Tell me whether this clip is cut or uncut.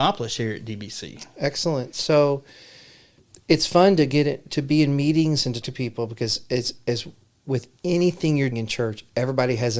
cut